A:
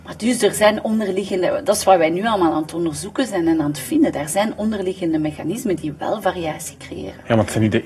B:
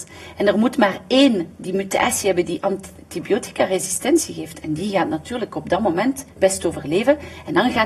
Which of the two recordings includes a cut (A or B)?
B